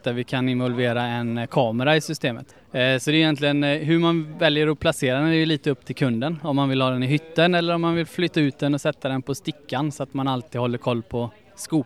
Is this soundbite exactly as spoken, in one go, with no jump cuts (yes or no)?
no